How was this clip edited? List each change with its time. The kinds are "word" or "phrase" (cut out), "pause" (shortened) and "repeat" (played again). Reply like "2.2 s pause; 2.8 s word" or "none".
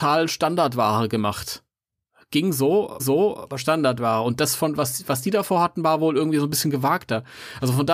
3.0 s repeat

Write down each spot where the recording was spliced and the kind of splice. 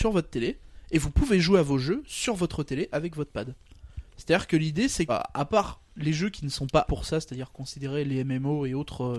4.1 s pause; 5.1 s word; 6.9 s word

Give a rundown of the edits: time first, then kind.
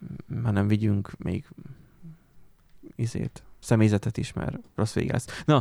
none

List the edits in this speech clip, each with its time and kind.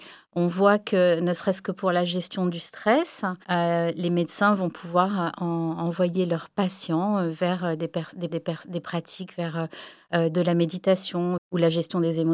3.4 s pause; 5.4 s word; 8.3 s repeat

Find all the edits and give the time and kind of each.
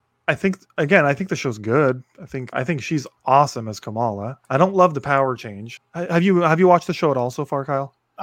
2.5 s phrase; 4.4 s pause; 5.8 s word

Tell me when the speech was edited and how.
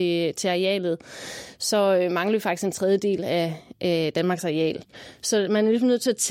none

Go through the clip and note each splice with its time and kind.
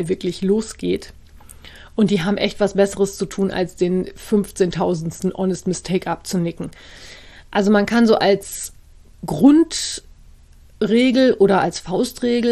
none

